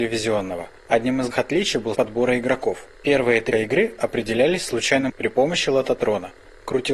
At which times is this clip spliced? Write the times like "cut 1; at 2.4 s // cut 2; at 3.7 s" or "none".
cut 1; at 1.3 s // cut 2; at 1.9 s // cut 3; at 2.9 s // cut 4; at 3.5 s // cut 5; at 5.1 s